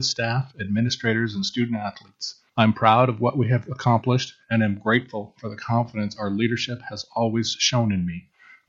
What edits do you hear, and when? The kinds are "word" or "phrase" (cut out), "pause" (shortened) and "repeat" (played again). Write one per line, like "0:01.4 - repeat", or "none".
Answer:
0:02.5 - pause